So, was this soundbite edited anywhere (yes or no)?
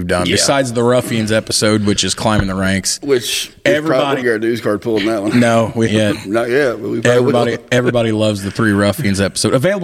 yes